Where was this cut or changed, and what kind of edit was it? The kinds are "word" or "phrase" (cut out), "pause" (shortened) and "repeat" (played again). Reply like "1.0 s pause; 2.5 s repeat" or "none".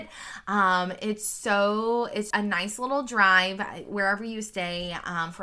2.3 s word